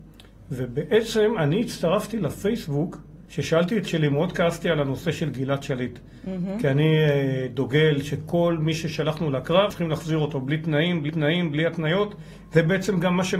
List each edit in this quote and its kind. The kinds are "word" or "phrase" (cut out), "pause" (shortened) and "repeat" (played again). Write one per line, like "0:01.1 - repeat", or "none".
0:03.2 - pause
0:03.8 - word
0:09.7 - word
0:11.1 - repeat